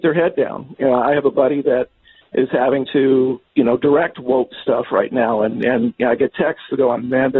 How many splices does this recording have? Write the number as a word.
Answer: zero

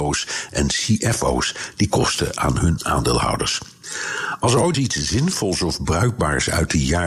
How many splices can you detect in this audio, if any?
one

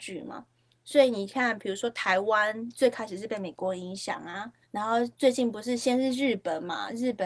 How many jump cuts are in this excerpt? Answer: one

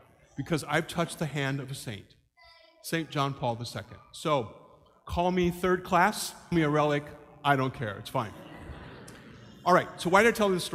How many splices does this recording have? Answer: one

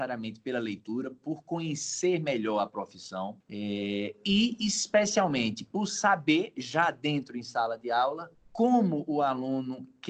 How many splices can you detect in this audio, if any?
one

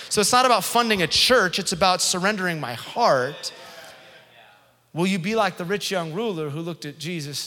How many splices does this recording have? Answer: zero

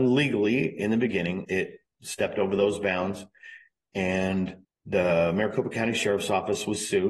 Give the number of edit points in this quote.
two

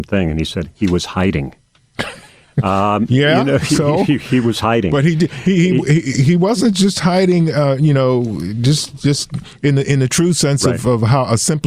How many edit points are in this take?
zero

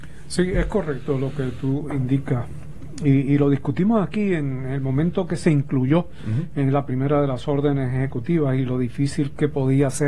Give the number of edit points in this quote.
zero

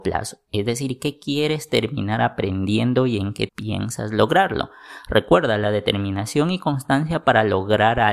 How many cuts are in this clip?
one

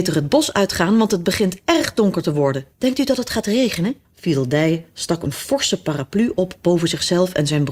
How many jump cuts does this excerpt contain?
two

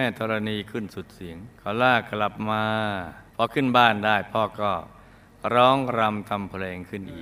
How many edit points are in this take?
two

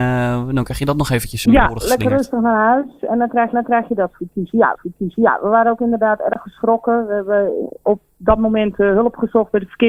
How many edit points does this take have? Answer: three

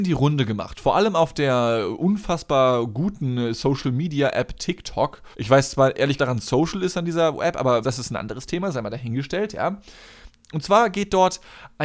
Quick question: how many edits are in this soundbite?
three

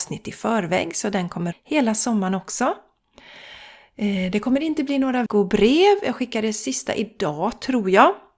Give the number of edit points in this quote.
two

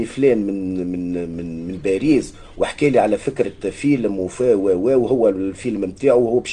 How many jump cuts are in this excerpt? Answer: zero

